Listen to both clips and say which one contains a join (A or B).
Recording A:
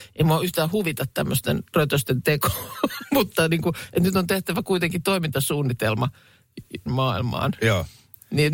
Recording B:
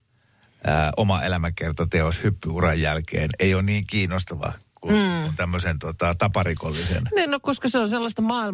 A